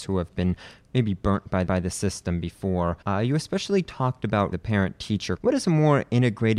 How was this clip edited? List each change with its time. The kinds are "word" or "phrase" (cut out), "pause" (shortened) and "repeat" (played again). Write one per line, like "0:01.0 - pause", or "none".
0:01.7 - repeat
0:03.0 - pause
0:04.5 - word
0:05.4 - word